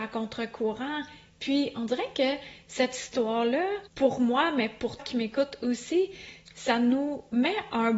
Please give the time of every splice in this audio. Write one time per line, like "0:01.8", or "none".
0:03.9
0:05.0